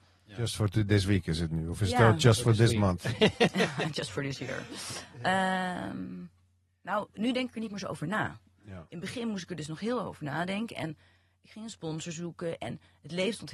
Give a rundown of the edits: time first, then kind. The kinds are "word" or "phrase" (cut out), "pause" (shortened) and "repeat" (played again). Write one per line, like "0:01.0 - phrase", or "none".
none